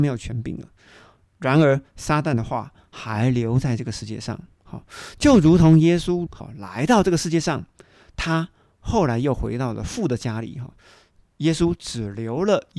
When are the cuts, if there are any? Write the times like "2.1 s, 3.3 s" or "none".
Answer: 6.3 s